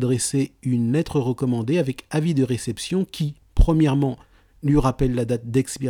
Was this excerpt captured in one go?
yes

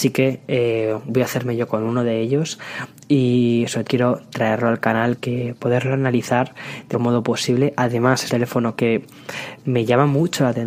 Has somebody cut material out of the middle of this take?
yes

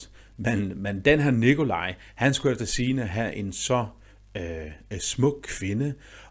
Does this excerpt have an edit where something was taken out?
no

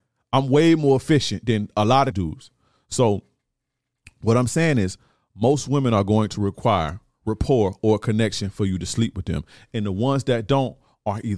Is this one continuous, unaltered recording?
no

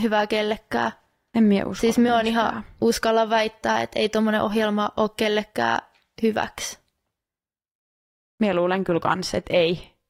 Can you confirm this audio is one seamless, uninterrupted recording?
yes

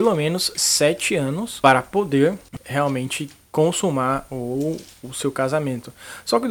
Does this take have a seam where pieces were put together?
no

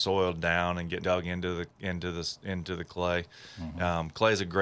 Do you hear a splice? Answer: yes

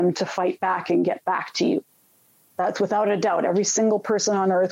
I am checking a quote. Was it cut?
no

